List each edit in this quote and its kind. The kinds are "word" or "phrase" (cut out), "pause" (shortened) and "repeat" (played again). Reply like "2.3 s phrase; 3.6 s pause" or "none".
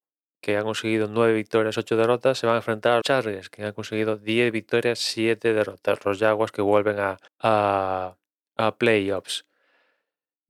3.0 s word; 7.3 s pause